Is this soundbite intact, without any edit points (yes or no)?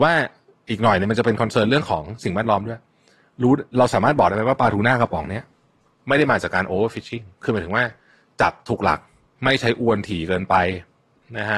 yes